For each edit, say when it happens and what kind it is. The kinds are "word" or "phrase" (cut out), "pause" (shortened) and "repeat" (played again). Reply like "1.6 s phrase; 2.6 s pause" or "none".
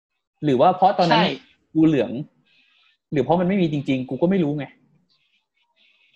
none